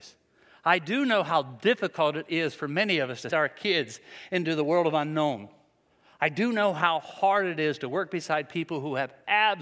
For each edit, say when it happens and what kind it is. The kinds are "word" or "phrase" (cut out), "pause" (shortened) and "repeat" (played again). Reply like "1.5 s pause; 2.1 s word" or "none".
3.3 s word